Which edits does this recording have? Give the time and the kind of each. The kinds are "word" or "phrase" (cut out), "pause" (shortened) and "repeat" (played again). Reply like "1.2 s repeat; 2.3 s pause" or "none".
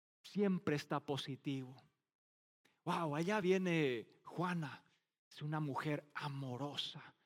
none